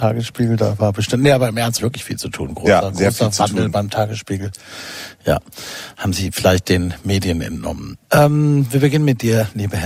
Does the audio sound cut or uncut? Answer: cut